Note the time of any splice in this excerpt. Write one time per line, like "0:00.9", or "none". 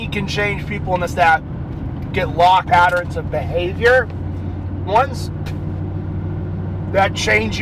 0:01.1
0:02.1
0:02.7
0:04.9